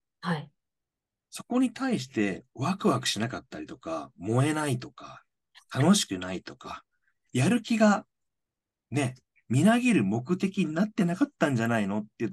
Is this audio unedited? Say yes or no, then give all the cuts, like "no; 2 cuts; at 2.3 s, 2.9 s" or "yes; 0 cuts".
no; 1 cut; at 7.3 s